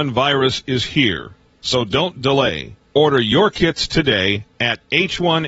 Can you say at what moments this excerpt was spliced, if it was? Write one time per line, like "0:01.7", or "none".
none